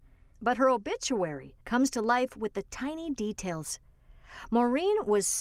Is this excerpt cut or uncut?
cut